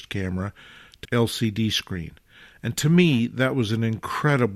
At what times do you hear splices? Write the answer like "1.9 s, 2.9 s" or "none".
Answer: 1.0 s